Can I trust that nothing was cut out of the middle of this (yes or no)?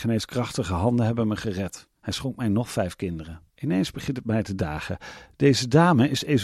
no